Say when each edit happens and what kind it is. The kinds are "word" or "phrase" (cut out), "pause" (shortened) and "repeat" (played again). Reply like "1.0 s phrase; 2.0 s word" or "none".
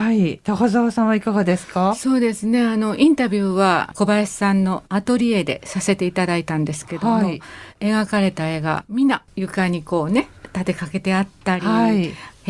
4.9 s pause; 9.3 s pause